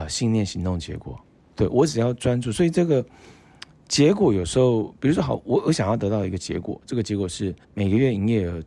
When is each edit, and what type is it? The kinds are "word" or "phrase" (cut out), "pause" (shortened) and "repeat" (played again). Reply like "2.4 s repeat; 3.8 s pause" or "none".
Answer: 1.2 s pause; 7.6 s pause

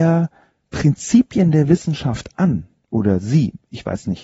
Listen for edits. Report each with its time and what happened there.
none

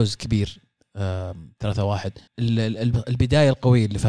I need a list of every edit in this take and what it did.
2.3 s pause

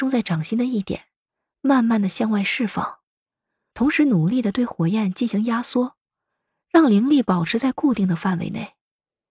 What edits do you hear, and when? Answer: none

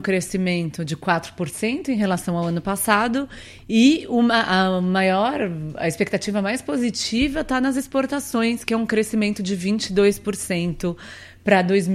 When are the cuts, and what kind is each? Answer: none

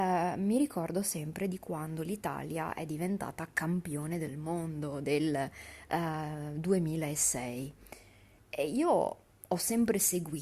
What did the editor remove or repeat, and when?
none

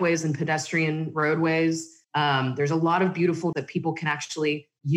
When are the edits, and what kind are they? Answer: 2.0 s pause; 3.5 s word

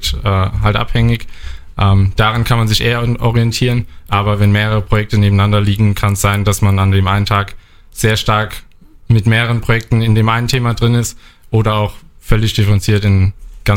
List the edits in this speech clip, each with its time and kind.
none

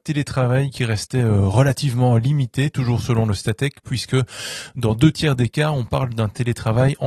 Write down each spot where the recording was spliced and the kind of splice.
none

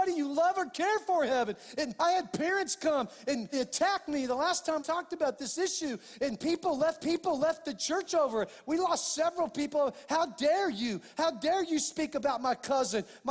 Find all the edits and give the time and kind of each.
2.0 s word; 3.5 s word; 4.8 s word; 7.0 s repeat

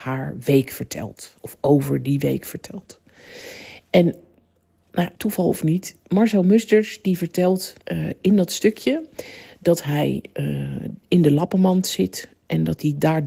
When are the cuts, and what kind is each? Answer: 5.2 s pause; 7.8 s pause

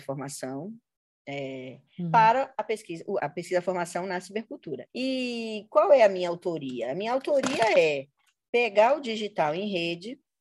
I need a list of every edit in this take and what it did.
3.2 s word; 4.9 s pause

